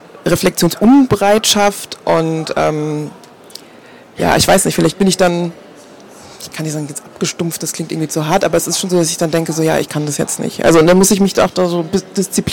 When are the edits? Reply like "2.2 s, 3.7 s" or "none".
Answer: none